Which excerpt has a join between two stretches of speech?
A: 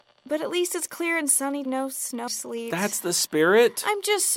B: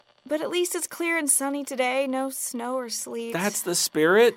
A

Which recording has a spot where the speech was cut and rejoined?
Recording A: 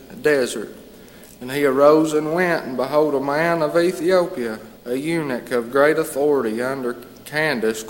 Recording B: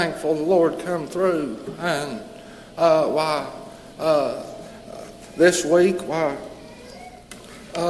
A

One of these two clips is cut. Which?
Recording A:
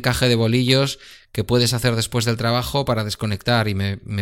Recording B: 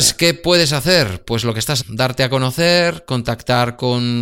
B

